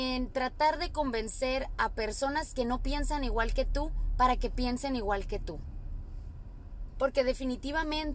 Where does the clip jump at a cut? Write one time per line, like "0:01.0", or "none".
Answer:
none